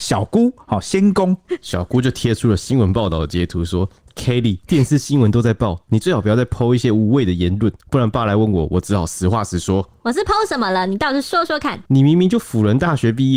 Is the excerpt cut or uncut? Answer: cut